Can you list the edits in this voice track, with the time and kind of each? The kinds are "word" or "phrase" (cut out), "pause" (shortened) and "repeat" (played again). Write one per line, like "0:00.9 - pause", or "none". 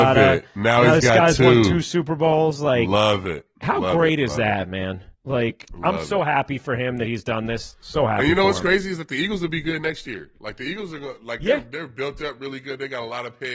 0:05.1 - pause

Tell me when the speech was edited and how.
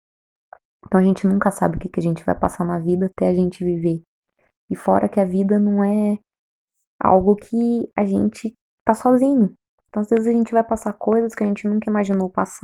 none

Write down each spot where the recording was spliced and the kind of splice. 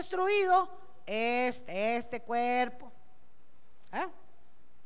0:01.7 - word

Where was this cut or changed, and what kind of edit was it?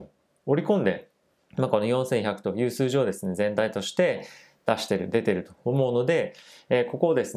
0:01.4 - pause

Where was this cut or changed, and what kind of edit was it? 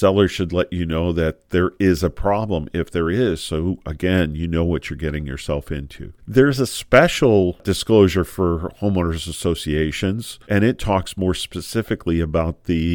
0:06.2 - pause
0:10.4 - pause

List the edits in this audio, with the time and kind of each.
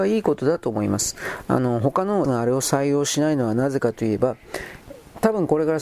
0:02.2 - word

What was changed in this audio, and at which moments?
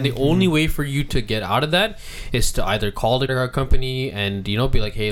0:03.3 - word

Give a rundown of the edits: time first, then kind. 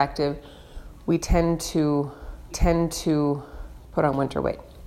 0:02.5 - repeat

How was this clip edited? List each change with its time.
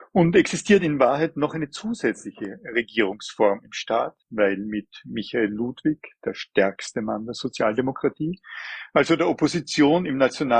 0:04.2 - pause

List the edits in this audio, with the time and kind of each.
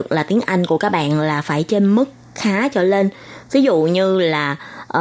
none

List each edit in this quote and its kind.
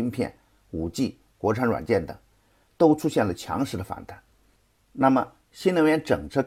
none

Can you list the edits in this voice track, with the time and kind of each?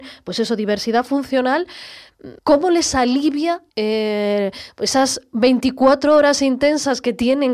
0:02.4 - pause
0:03.7 - pause

